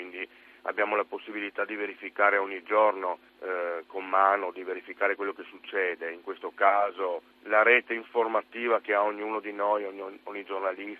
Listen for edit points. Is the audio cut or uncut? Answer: cut